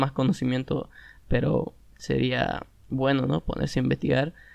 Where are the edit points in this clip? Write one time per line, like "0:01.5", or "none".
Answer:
none

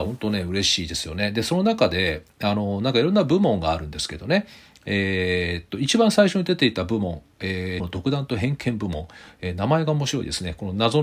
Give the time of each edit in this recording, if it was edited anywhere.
0:07.8

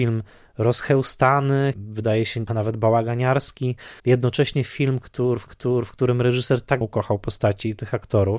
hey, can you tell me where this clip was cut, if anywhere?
0:01.7
0:02.5
0:04.0
0:05.5
0:06.8

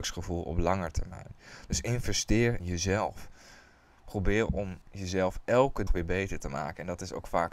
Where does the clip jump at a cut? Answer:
0:02.6
0:04.8
0:05.9

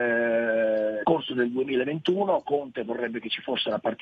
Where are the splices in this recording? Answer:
0:01.0

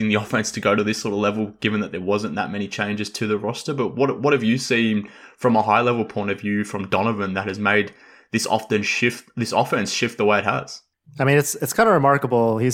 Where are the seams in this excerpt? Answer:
none

